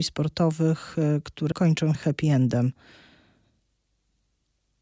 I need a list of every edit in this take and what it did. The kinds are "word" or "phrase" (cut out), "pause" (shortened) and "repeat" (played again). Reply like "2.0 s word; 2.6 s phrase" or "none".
1.5 s word; 1.9 s word